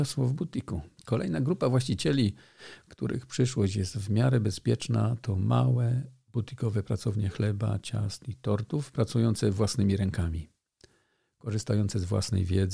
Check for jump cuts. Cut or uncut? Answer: cut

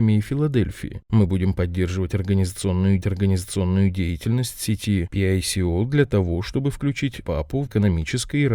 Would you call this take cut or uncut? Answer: cut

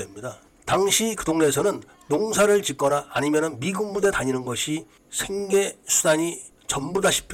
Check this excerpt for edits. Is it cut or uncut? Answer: uncut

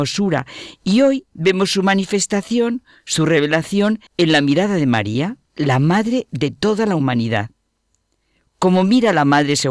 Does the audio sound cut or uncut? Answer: cut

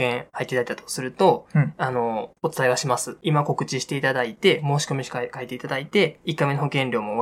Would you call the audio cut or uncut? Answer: cut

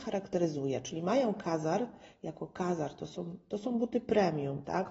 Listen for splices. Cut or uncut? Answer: uncut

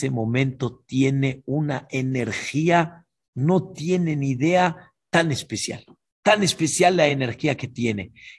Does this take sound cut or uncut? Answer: uncut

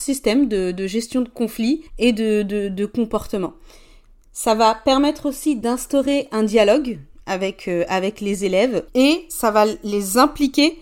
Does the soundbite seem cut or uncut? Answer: cut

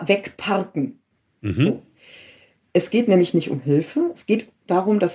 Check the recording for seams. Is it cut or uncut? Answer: uncut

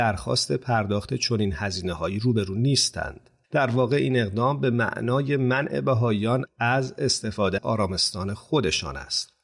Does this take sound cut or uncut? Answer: cut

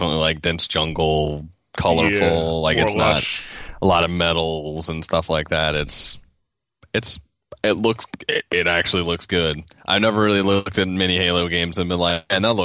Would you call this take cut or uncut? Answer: uncut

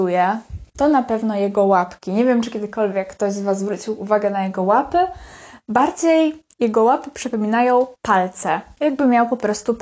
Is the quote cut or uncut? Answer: cut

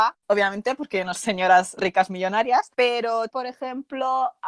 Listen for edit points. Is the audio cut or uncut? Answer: cut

